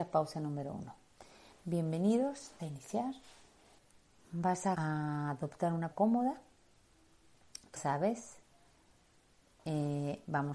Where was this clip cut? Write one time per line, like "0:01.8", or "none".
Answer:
0:02.6
0:03.8
0:04.7
0:05.9
0:07.8